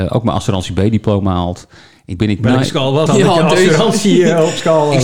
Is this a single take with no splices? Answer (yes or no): no